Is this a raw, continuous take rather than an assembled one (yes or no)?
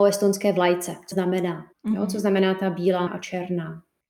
no